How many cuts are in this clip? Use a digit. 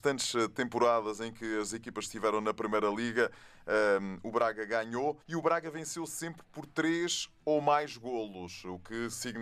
1